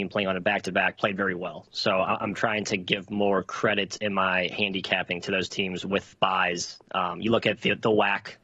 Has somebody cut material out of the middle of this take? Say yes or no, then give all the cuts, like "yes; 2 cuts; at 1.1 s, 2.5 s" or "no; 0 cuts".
yes; 1 cut; at 6.1 s